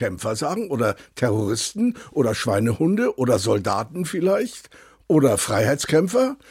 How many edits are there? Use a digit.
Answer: 0